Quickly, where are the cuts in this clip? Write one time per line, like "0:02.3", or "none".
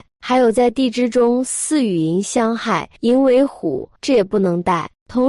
0:03.0
0:04.0